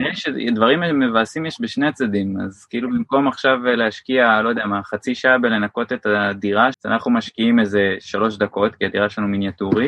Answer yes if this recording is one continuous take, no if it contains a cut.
no